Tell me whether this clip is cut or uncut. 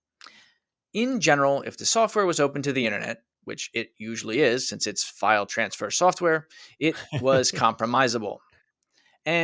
uncut